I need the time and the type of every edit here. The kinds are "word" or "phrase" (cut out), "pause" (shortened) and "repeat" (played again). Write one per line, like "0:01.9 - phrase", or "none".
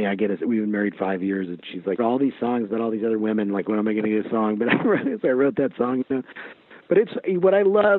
0:02.0 - phrase

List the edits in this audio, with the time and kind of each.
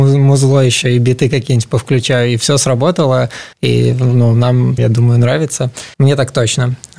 0:03.5 - pause
0:04.8 - word
0:05.9 - pause

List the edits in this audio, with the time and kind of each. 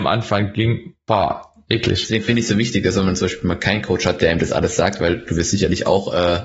none

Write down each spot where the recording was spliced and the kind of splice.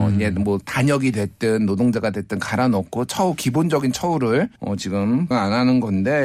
0:04.6 - pause
0:05.3 - word

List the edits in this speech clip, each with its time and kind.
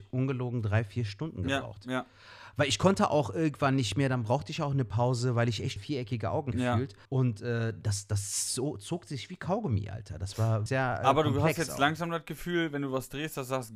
0:05.8 - word
0:06.5 - word
0:07.0 - pause
0:10.7 - word

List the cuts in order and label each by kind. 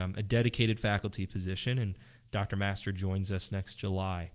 none

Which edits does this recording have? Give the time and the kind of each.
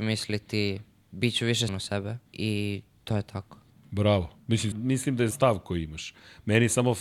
0:01.7 - word
0:02.3 - pause
0:03.7 - pause
0:04.7 - word
0:05.3 - word

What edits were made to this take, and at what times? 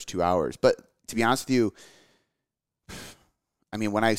none

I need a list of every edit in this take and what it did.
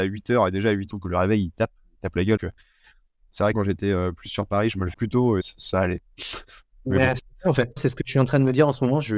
0:00.9 - word
0:02.4 - word
0:03.5 - word
0:04.9 - word
0:05.4 - word
0:07.8 - word

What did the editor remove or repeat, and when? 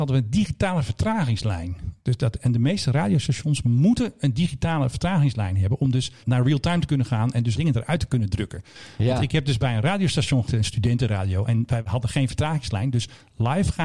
0:06.2 - word
0:07.5 - word
0:10.5 - word

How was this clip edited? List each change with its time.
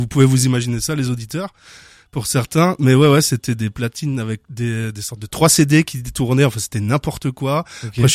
none

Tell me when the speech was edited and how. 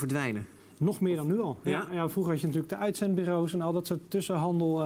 none

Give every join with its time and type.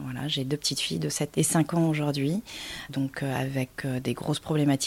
0:01.3 - word

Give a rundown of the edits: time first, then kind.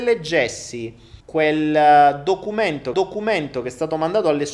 0:01.2 - pause
0:02.9 - repeat

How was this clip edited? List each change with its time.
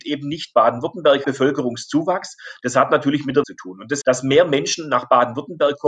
0:01.2 - word
0:03.4 - word
0:04.0 - word

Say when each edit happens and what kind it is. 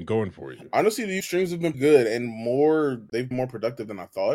0:01.2 - word
0:01.7 - word
0:03.3 - word

